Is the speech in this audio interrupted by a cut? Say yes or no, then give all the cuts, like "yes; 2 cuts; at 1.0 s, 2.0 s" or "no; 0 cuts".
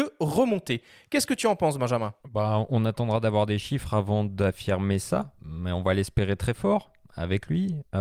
yes; 2 cuts; at 2.2 s, 5.4 s